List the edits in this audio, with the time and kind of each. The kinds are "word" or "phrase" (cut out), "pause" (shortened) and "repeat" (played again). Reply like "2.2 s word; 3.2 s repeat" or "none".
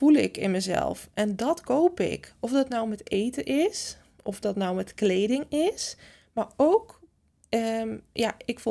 none